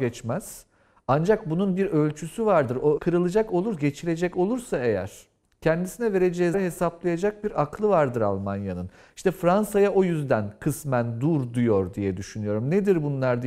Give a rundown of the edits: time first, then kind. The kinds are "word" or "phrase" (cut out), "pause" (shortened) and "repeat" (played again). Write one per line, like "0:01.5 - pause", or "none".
0:03.0 - word
0:06.5 - word